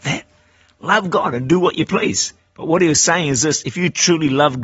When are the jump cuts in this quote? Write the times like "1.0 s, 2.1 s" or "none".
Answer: 2.4 s

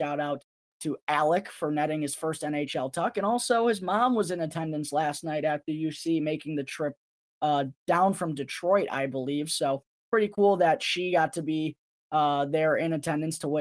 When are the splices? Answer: none

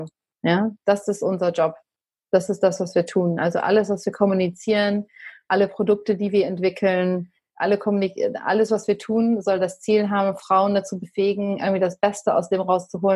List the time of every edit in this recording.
none

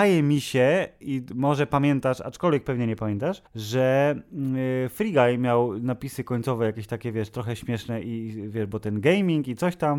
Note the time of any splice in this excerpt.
3.5 s

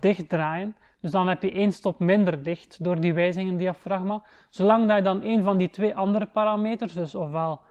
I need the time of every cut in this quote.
none

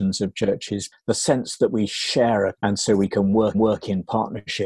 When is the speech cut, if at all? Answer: 0.9 s, 2.6 s, 3.5 s

